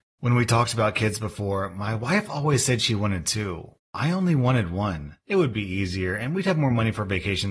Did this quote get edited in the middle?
no; 0 cuts

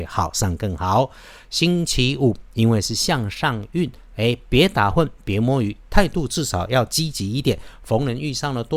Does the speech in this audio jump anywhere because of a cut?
no; 0 cuts

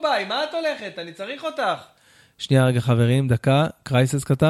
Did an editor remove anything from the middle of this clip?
no; 0 cuts

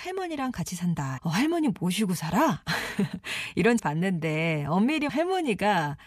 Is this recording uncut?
no; 3 cuts; at 1.2 s, 3.8 s, 5.1 s

